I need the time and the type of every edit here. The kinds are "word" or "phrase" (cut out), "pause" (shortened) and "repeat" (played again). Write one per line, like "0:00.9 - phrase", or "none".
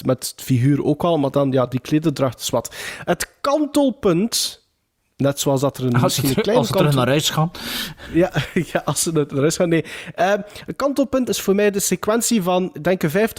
0:11.3 - phrase